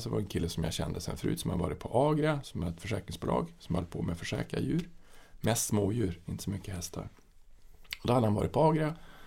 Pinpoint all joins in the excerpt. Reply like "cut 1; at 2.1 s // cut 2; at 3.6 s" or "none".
none

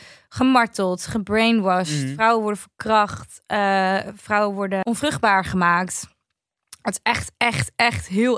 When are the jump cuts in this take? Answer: none

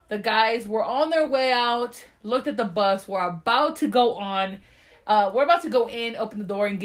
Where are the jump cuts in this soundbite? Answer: none

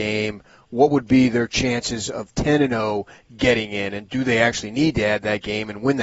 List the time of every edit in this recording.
none

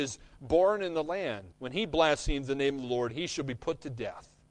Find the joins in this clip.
cut 1; at 1.5 s

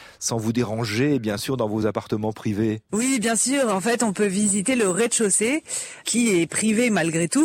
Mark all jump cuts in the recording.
none

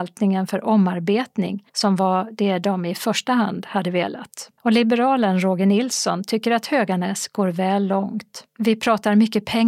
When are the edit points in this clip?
cut 1; at 1.7 s // cut 2; at 4.6 s // cut 3; at 8.5 s

